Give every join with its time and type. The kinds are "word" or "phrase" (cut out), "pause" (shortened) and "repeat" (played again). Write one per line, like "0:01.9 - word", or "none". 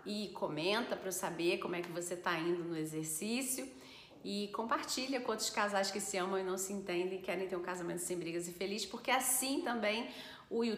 none